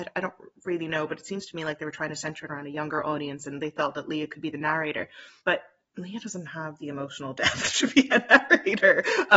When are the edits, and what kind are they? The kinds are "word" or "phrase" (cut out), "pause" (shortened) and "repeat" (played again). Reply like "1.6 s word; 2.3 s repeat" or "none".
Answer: 5.4 s pause